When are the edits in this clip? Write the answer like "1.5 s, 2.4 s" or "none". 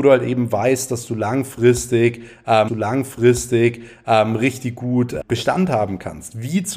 2.7 s, 5.2 s